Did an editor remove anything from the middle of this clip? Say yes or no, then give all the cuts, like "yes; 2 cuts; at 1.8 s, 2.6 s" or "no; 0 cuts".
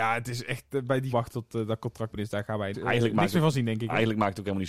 yes; 3 cuts; at 1.1 s, 2.1 s, 2.7 s